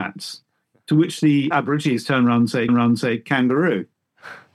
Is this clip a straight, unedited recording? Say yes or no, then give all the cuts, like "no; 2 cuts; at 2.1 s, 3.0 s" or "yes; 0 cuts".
no; 2 cuts; at 1.5 s, 2.7 s